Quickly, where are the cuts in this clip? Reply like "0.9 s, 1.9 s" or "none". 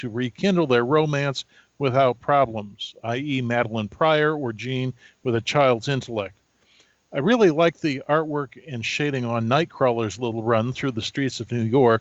none